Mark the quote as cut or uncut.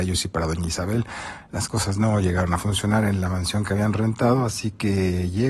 uncut